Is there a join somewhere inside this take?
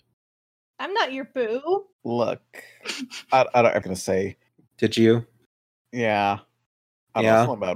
yes; 3 cuts; at 1.9 s, 3.8 s, 4.5 s

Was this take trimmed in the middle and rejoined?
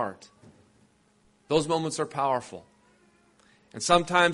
no; 0 cuts

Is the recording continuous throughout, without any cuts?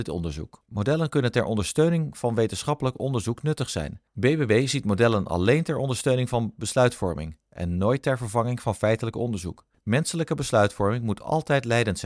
yes; 0 cuts

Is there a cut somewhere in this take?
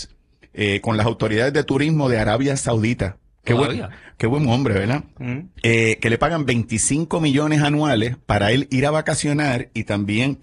yes; 1 cut; at 5.5 s

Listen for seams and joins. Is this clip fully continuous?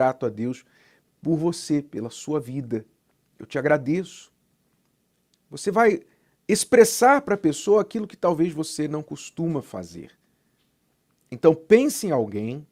yes; 0 cuts

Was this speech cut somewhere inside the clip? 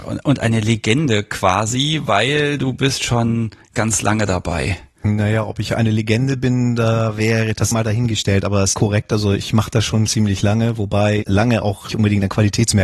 yes; 6 cuts; at 3.7 s, 7.7 s, 8.7 s, 10.1 s, 11.2 s, 11.9 s

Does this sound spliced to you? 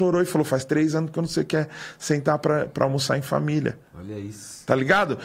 no; 0 cuts

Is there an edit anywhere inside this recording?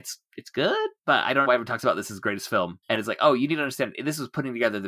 yes; 3 cuts; at 1.0 s, 1.4 s, 2.8 s

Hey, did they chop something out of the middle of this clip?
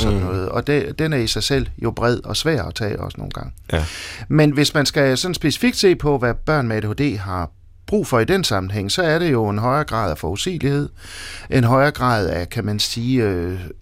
no; 0 cuts

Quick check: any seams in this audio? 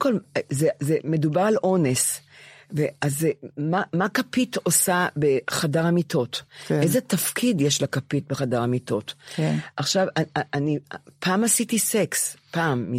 no; 0 cuts

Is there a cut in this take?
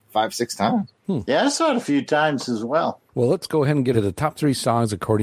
yes; 1 cut; at 3.9 s

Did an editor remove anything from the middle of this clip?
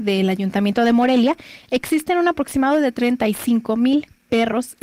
no; 0 cuts

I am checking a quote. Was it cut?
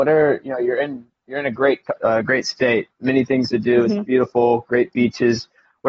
no; 0 cuts

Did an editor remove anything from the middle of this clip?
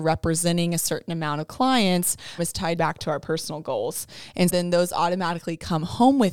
yes; 3 cuts; at 2.4 s, 2.8 s, 4.5 s

